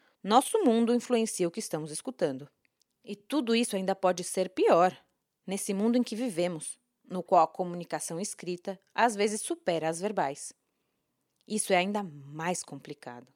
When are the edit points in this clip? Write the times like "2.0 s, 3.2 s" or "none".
none